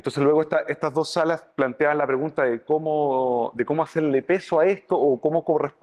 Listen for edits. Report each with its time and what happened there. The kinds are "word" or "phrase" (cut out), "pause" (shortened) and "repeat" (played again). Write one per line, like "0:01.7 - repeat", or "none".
0:01.5 - pause